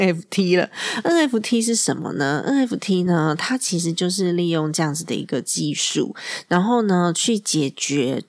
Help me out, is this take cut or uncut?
uncut